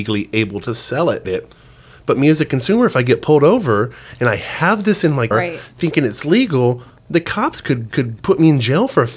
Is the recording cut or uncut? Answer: cut